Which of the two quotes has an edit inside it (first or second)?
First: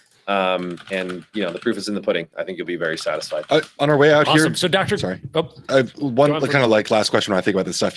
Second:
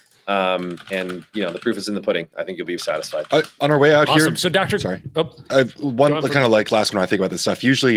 second